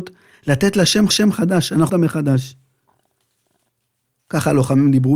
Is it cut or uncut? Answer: cut